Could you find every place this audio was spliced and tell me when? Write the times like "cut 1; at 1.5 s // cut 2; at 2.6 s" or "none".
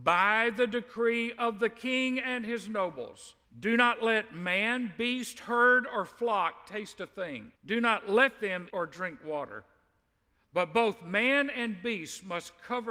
cut 1; at 3.4 s // cut 2; at 7.6 s // cut 3; at 8.7 s